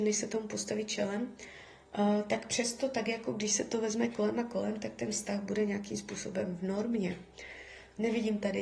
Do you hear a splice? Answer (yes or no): no